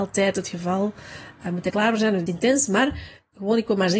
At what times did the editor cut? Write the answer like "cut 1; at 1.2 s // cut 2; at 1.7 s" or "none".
cut 1; at 1.7 s // cut 2; at 2.3 s